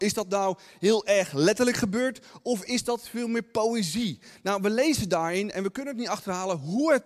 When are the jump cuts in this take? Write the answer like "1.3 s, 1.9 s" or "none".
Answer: none